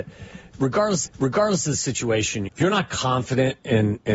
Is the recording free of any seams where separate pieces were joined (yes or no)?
no